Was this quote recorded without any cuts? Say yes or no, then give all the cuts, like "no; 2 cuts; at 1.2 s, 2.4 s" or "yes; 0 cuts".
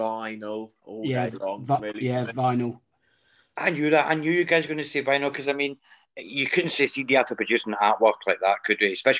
yes; 0 cuts